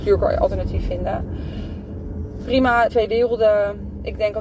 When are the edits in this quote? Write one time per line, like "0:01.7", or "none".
0:02.9